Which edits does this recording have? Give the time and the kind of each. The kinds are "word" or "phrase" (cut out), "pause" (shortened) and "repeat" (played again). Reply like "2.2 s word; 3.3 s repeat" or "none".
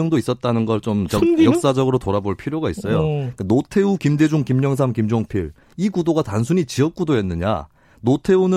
none